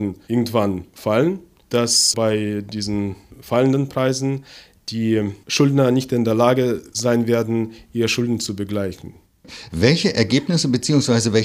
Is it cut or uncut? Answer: uncut